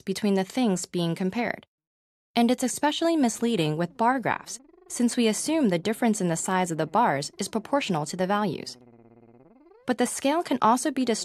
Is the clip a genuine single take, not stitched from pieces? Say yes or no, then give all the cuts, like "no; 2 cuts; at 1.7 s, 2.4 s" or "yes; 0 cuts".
yes; 0 cuts